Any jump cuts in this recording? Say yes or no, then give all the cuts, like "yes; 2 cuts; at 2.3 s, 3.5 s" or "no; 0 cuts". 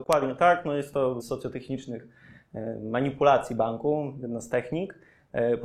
yes; 1 cut; at 1.2 s